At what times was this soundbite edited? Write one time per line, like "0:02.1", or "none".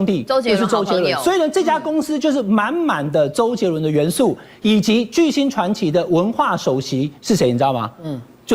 0:07.2

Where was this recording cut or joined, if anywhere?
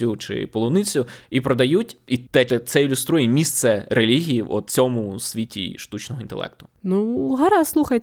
0:02.5
0:04.7

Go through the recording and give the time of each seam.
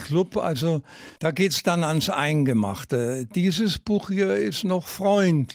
0:01.2

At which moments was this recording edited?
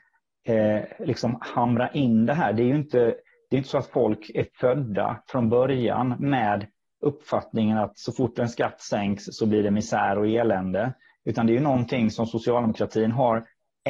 none

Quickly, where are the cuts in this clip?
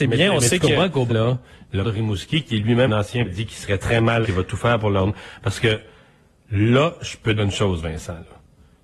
0:01.1
0:01.8
0:02.9
0:03.2
0:04.2
0:07.4

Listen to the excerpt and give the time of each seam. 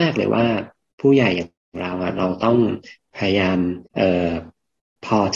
0:03.9

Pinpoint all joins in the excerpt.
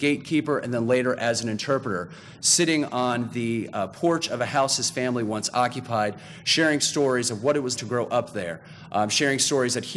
0:07.8

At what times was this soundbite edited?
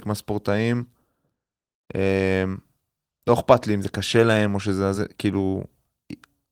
none

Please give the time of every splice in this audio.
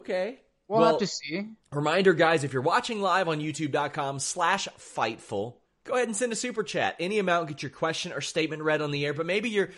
0:01.6
0:05.6

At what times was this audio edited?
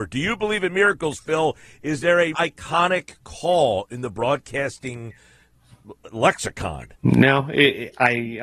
0:02.3
0:06.9

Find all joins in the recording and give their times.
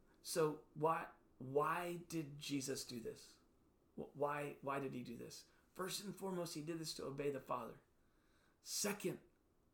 none

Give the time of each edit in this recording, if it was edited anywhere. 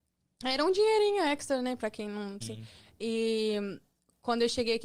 0:02.4

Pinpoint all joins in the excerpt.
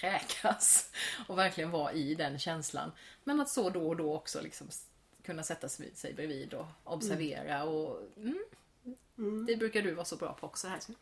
none

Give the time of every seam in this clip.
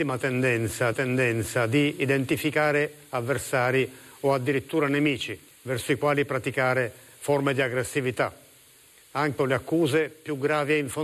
0:00.9
0:05.5
0:09.4

